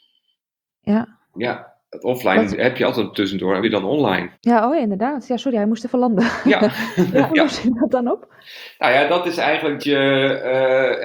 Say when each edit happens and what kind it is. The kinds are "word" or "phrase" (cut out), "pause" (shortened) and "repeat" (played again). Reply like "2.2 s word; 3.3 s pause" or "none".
1.2 s pause; 3.1 s word; 3.6 s phrase; 4.3 s pause; 7.3 s phrase; 9.1 s word; 9.8 s word